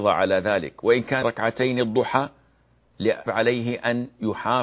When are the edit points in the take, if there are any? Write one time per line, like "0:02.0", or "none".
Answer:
0:01.2
0:03.3

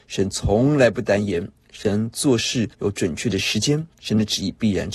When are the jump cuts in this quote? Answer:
0:02.7
0:03.9

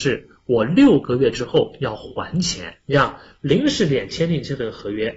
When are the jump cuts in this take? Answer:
none

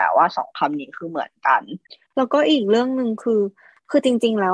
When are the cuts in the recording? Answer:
none

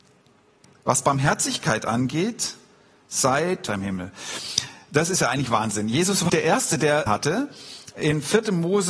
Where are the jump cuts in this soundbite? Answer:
0:03.7
0:06.3
0:07.1

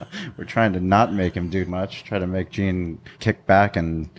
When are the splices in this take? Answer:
0:01.7
0:03.1

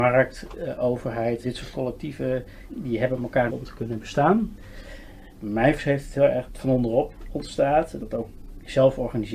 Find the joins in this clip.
0:01.4
0:02.7
0:03.5
0:05.8
0:06.5
0:08.0

